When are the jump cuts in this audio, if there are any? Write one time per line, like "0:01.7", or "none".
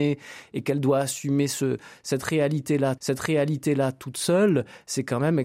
0:03.0